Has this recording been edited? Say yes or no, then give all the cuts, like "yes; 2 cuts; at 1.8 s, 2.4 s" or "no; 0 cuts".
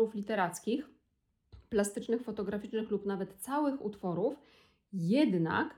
no; 0 cuts